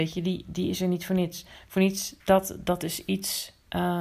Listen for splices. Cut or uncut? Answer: cut